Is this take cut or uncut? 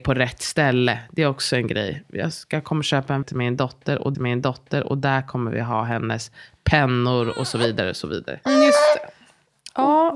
cut